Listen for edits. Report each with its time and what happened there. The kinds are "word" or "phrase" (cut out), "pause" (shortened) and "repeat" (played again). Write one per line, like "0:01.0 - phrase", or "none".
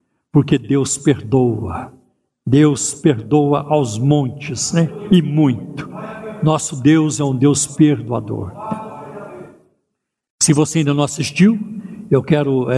none